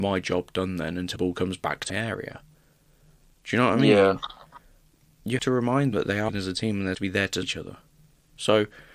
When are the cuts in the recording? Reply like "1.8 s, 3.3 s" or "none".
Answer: 1.2 s, 1.9 s, 5.4 s, 5.9 s, 6.3 s, 6.9 s, 7.4 s